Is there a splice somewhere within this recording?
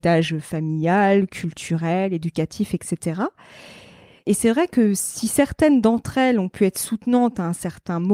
no; 0 cuts

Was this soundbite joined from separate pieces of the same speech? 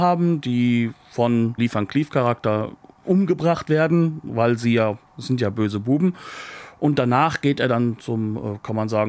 yes; 1 cut; at 1.6 s

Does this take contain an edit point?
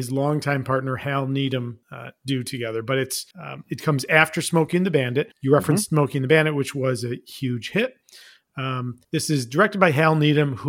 yes; 4 cuts; at 1.8 s, 3.3 s, 5.3 s, 9.0 s

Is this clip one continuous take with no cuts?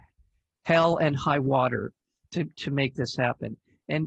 yes; 0 cuts

